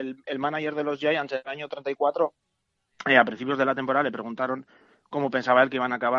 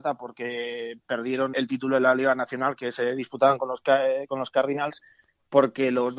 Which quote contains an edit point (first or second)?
second